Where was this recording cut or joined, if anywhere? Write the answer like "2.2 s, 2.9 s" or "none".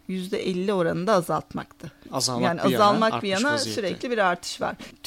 none